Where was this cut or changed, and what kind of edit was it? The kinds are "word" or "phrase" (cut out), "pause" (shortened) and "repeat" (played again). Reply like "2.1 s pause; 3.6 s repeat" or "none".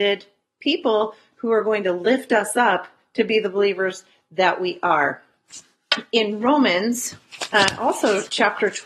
none